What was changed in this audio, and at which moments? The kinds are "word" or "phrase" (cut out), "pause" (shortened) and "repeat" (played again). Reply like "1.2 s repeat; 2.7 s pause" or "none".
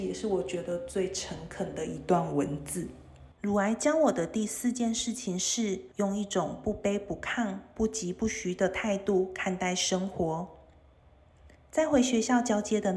3.3 s pause; 5.9 s pause